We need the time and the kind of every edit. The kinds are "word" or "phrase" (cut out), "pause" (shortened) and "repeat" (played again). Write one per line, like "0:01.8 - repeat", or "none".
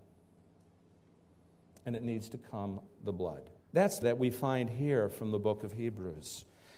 0:02.9 - word
0:03.6 - pause
0:04.0 - word